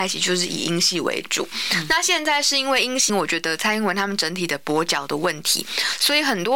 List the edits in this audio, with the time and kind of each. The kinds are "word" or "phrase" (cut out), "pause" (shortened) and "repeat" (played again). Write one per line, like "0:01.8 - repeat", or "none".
0:03.1 - phrase